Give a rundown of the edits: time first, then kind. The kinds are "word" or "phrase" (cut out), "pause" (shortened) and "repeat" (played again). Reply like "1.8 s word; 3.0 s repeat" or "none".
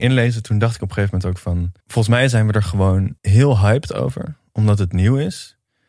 1.8 s pause; 3.2 s pause